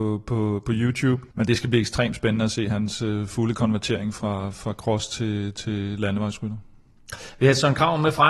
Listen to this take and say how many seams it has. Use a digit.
1